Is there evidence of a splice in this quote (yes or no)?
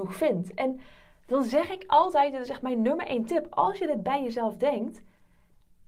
no